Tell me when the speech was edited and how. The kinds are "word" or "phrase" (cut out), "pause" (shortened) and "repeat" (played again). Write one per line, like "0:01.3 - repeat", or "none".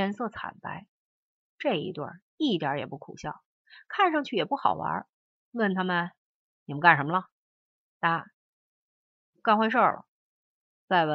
none